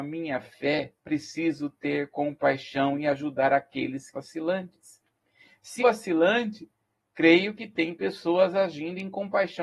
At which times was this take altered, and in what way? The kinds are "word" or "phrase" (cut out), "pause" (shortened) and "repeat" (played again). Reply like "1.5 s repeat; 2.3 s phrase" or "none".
1.0 s pause; 4.1 s word; 5.8 s word